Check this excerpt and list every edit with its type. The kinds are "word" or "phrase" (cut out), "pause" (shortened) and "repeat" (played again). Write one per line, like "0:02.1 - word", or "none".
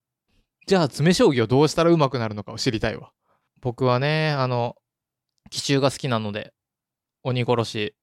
none

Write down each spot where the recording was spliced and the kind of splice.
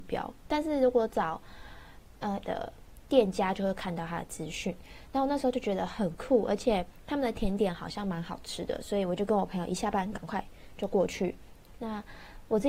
0:02.4 - word

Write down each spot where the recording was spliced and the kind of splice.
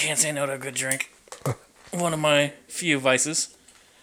0:01.2 - pause

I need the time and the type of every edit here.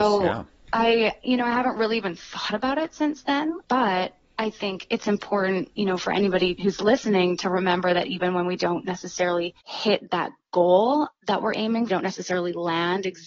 0:11.9 - phrase

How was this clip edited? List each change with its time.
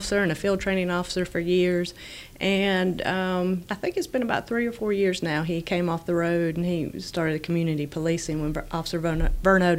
0:03.7 - word

